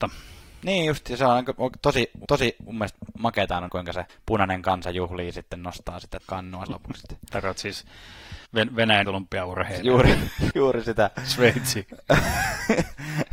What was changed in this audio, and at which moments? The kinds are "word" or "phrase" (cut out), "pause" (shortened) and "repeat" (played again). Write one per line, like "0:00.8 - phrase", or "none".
0:02.2 - repeat
0:03.7 - word
0:04.1 - pause
0:06.2 - word
0:06.7 - word
0:08.5 - pause
0:09.0 - word
0:10.5 - word